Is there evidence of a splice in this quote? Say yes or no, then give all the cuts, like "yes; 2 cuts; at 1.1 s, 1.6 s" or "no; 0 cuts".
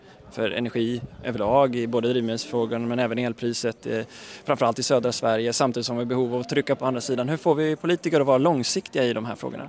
yes; 1 cut; at 6.8 s